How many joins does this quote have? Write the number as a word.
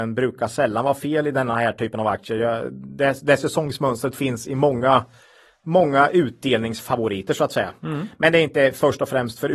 zero